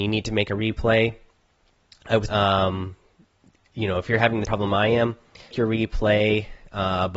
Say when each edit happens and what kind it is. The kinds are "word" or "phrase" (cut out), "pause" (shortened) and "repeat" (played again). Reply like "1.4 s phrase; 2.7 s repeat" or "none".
2.3 s word; 4.4 s word; 5.5 s word